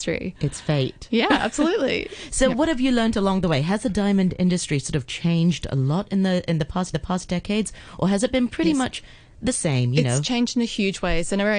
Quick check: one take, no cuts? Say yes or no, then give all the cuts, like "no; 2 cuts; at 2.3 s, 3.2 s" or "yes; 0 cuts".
no; 1 cut; at 6.9 s